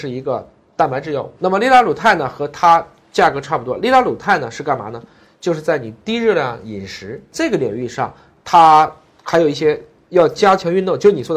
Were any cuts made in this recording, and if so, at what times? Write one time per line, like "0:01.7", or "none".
none